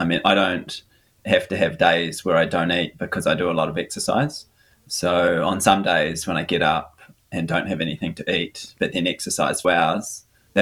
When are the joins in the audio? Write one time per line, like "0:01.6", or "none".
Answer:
0:09.6